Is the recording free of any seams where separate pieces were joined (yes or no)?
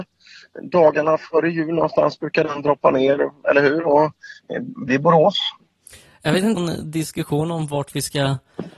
no